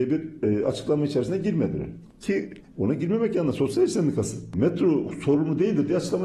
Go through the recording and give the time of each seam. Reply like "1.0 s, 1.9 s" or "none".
none